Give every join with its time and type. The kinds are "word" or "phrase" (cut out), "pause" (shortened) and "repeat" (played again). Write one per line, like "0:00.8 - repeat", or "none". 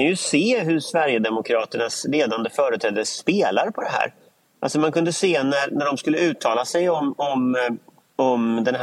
none

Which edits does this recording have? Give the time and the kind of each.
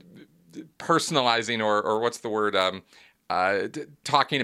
none

